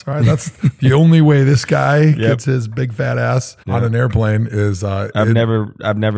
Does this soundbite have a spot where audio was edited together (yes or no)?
yes